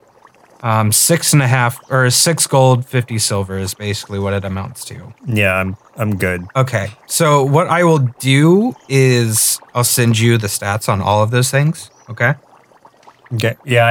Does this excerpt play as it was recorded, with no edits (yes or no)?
no